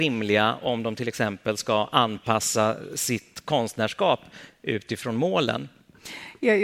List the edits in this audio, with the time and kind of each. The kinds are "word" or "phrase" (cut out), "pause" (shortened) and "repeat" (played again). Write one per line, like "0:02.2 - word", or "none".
none